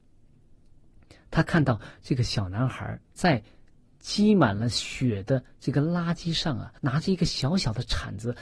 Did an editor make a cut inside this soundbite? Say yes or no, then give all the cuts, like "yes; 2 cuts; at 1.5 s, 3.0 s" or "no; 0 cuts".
yes; 2 cuts; at 3.0 s, 6.8 s